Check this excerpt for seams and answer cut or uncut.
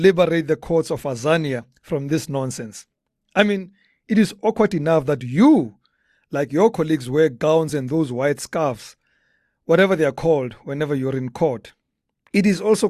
uncut